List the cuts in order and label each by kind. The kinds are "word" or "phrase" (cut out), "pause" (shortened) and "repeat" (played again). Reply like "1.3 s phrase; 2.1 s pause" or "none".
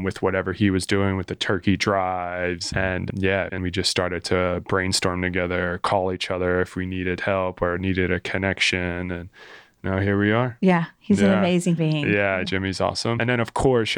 3.6 s word; 11.8 s word